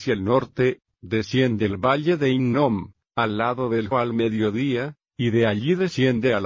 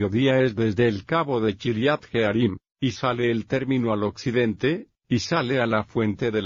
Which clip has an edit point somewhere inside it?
first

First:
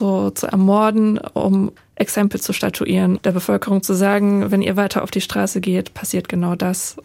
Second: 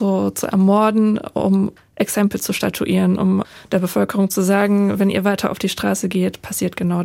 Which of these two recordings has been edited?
first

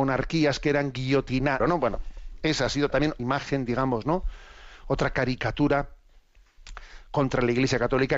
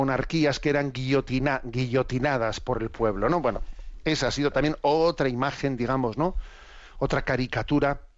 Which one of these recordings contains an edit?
first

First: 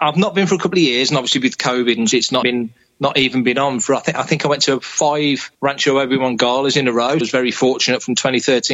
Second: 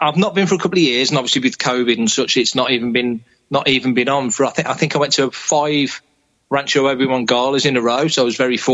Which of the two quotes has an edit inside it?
first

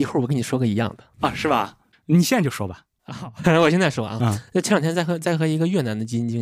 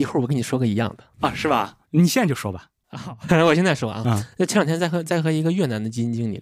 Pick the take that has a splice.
second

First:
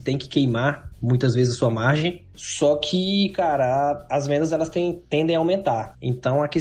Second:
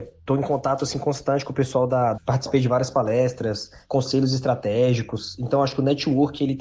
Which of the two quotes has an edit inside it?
second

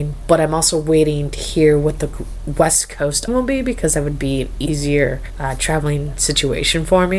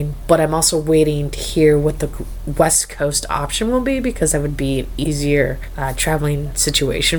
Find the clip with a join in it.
first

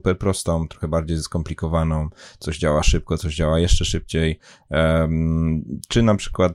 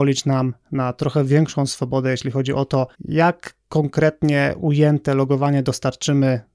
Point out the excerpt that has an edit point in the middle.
second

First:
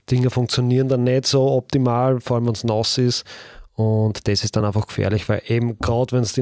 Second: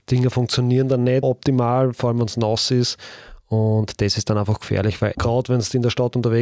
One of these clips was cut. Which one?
second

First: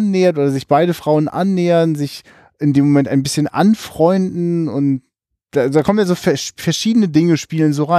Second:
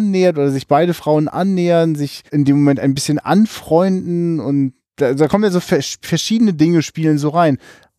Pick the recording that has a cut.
second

